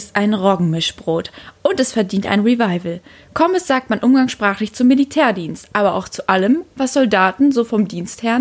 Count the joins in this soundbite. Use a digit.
0